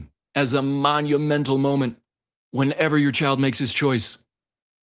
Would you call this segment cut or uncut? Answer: uncut